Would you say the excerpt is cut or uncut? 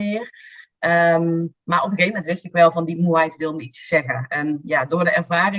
uncut